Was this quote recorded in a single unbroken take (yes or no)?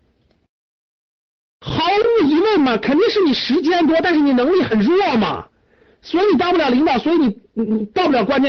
yes